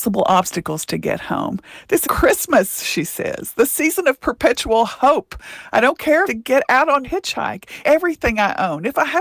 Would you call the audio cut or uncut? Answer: cut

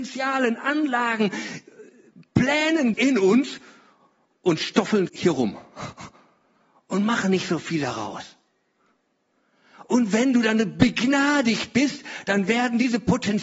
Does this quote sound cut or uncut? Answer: cut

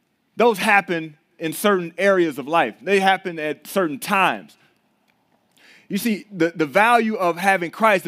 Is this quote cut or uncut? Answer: uncut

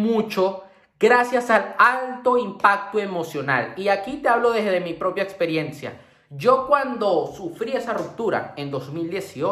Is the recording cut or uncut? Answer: uncut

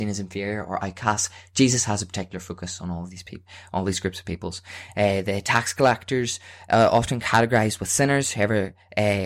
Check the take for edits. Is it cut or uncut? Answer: uncut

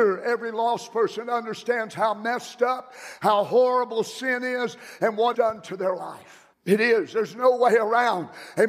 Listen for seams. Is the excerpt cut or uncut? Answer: cut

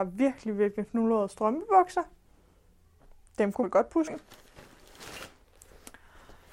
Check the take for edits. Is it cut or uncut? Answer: cut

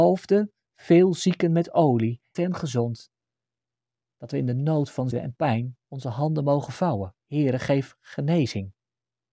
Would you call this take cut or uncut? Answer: cut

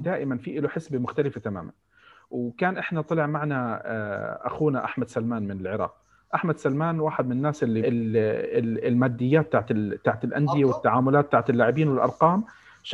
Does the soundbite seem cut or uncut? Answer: cut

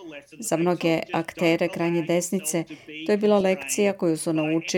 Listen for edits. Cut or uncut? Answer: uncut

